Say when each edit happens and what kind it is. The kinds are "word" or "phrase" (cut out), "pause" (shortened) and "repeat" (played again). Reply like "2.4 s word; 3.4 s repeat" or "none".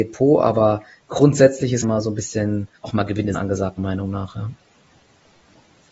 1.8 s phrase; 2.8 s pause; 3.3 s word; 3.8 s word